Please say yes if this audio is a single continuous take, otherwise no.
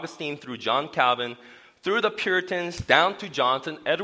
yes